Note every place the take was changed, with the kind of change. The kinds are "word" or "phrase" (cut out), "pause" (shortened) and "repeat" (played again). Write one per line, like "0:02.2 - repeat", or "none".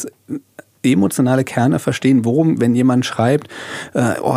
none